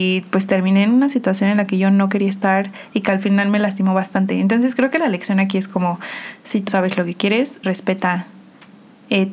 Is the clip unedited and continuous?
no; 2 cuts; at 6.7 s, 7.6 s

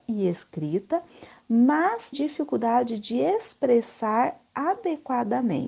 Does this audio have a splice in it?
yes; 1 cut; at 2.1 s

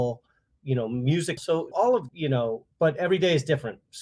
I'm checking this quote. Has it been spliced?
yes; 4 cuts; at 1.4 s, 1.7 s, 2.1 s, 2.7 s

